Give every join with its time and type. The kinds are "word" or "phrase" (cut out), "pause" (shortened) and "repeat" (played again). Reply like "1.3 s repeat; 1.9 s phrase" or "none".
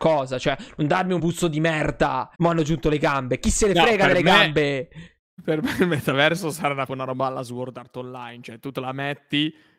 1.2 s word; 2.3 s pause; 6.9 s phrase